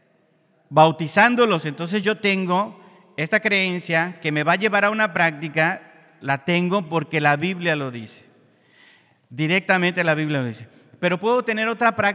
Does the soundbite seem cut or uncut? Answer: uncut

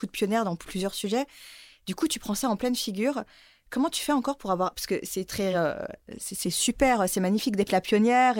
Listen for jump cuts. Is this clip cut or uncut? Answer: uncut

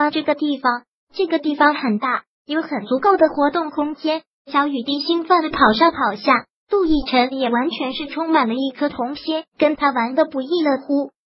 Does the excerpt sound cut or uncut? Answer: cut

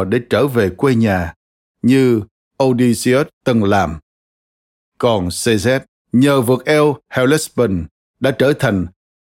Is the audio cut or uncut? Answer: cut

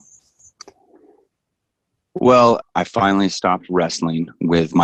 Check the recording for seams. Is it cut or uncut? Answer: cut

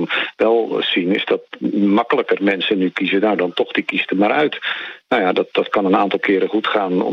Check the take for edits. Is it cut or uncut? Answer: uncut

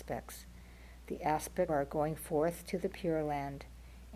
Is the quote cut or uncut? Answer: cut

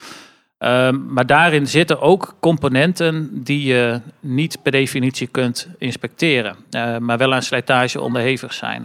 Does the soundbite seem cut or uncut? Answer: uncut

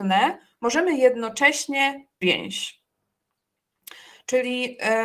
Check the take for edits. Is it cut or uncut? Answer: cut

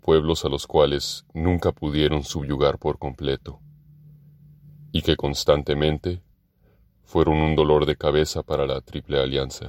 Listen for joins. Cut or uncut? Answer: uncut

